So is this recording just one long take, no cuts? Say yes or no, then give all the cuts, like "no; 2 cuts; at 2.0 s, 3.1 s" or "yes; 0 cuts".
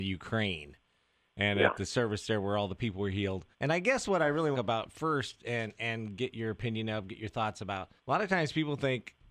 no; 3 cuts; at 3.5 s, 4.5 s, 8.0 s